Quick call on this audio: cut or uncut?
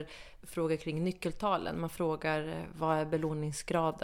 uncut